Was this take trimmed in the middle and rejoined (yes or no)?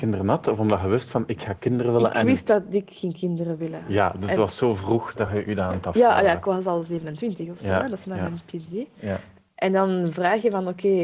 no